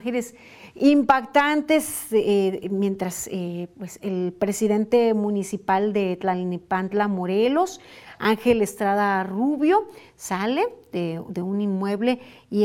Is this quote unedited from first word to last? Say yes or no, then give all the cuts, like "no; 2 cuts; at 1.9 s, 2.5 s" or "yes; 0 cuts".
yes; 0 cuts